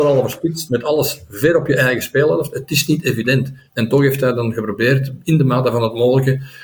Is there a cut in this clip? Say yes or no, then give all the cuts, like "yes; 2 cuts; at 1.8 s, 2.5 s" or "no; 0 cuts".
yes; 1 cut; at 3.7 s